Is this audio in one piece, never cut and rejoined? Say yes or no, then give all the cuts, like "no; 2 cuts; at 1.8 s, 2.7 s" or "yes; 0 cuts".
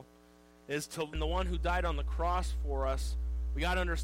no; 1 cut; at 1.1 s